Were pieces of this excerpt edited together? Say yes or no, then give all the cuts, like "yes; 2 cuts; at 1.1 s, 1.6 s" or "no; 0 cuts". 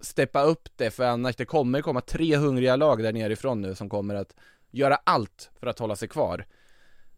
yes; 1 cut; at 5.6 s